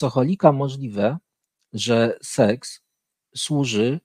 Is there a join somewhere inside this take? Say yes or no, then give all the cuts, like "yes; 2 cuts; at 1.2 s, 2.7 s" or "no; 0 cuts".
no; 0 cuts